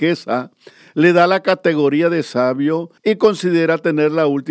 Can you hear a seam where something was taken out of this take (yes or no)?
yes